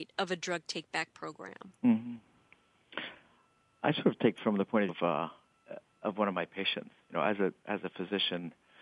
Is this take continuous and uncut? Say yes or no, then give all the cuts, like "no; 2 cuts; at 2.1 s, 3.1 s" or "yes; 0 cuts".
no; 3 cuts; at 1.7 s, 4.4 s, 4.9 s